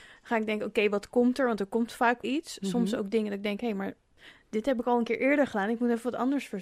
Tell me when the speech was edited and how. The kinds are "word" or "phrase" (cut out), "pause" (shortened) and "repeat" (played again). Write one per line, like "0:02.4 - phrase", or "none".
0:02.2 - word